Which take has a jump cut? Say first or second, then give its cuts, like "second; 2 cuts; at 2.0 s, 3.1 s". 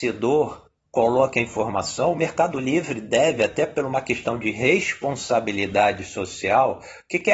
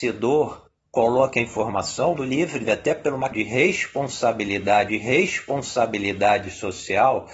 second; 4 cuts; at 2.2 s, 2.6 s, 3.3 s, 4.9 s